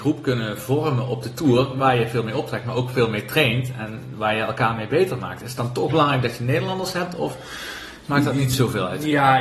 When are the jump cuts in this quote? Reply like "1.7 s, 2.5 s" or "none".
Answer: none